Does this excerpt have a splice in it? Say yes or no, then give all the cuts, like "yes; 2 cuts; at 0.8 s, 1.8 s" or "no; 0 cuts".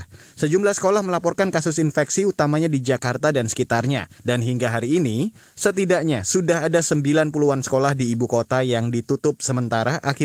yes; 1 cut; at 4.2 s